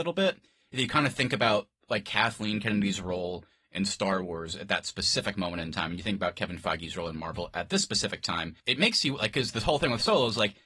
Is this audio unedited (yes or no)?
no